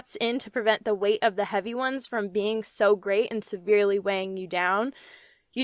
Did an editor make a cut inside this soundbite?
no; 0 cuts

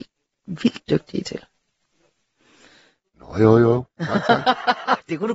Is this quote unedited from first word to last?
yes; 0 cuts

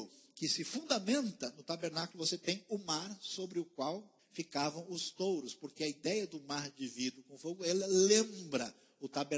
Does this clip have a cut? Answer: yes; 1 cut; at 4.2 s

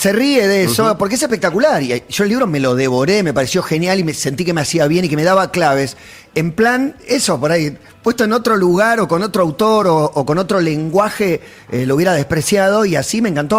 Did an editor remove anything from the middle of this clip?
no; 0 cuts

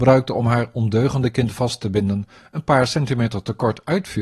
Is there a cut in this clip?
no; 0 cuts

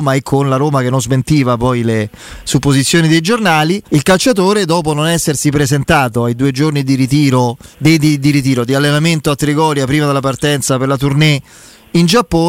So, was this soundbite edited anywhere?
yes; 2 cuts; at 3.9 s, 7.7 s

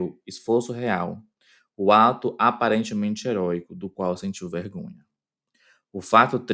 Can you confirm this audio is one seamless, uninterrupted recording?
yes; 0 cuts

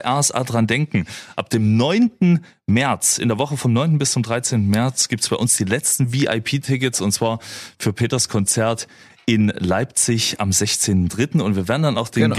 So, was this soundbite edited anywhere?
no; 0 cuts

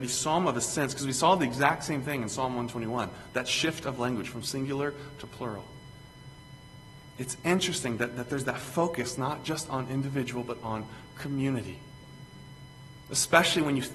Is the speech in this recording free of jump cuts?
yes; 0 cuts

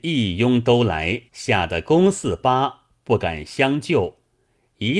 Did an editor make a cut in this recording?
yes; 1 cut; at 1.3 s

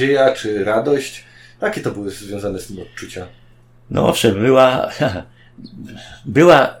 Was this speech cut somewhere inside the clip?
no; 0 cuts

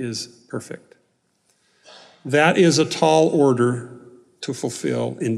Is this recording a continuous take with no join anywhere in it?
yes; 0 cuts

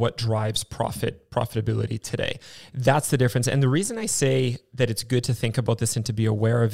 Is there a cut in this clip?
no; 0 cuts

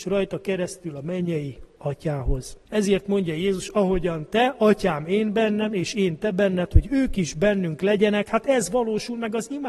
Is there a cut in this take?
yes; 1 cut; at 2.6 s

